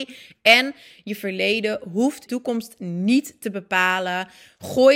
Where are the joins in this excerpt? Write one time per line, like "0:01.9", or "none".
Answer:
0:02.3